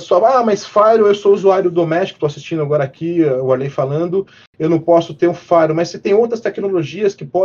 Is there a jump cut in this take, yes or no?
no